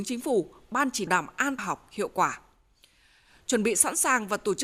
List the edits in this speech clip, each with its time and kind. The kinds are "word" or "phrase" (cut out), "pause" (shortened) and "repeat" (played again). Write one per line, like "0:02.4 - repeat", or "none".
0:01.1 - phrase
0:01.6 - phrase